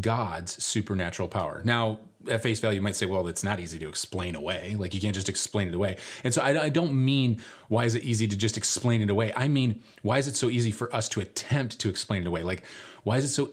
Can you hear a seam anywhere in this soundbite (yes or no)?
no